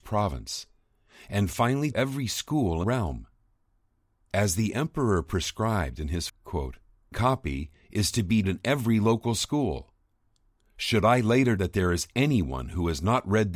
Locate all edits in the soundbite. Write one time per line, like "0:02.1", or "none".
0:01.9
0:02.8
0:06.3
0:07.1
0:08.4
0:11.6